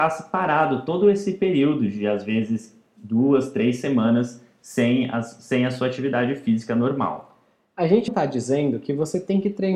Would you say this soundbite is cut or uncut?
cut